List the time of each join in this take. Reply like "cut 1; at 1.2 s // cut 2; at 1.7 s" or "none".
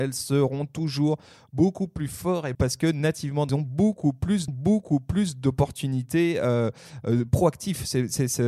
cut 1; at 2.5 s // cut 2; at 3.5 s // cut 3; at 4.5 s